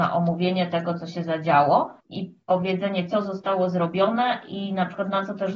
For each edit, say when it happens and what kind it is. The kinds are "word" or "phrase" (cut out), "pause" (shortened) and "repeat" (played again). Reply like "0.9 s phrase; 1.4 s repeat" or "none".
2.0 s pause